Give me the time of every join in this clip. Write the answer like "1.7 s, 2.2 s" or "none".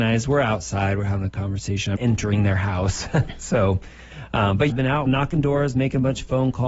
2.0 s, 4.7 s, 5.1 s